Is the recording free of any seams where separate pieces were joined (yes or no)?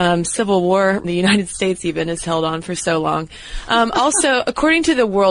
no